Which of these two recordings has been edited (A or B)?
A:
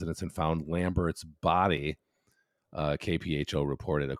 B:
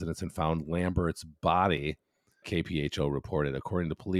B